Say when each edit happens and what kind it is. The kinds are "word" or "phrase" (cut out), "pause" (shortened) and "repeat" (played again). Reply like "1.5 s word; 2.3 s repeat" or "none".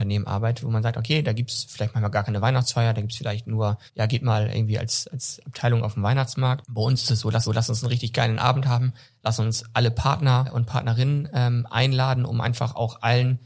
3.9 s pause; 7.4 s repeat